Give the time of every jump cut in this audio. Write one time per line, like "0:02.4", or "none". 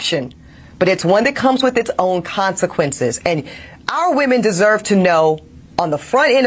none